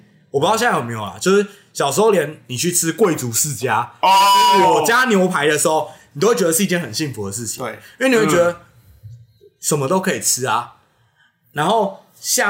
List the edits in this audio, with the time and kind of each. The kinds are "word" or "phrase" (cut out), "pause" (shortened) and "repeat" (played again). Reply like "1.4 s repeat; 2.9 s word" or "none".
none